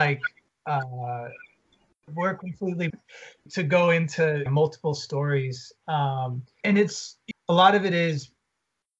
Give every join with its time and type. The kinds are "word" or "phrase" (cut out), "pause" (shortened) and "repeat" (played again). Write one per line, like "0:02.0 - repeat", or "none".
0:02.1 - word
0:02.9 - word
0:03.5 - word
0:04.5 - word
0:06.6 - word
0:07.3 - word